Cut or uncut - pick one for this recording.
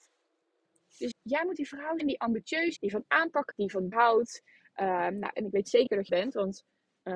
cut